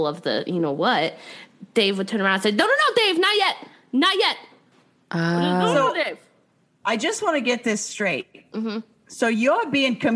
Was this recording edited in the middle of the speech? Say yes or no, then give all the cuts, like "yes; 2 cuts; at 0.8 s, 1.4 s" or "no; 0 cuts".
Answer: no; 0 cuts